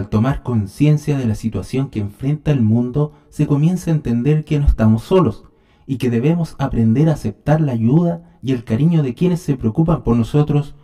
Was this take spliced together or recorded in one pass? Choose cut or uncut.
uncut